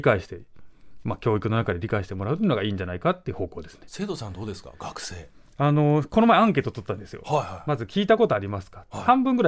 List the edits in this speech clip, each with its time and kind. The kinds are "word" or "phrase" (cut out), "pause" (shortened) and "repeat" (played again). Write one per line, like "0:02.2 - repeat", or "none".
none